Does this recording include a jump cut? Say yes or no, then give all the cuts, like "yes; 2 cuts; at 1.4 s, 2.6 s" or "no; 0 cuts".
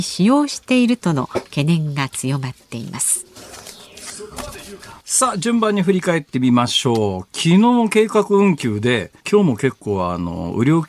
yes; 2 cuts; at 5.0 s, 9.2 s